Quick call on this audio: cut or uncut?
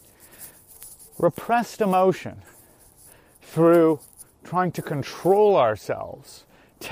uncut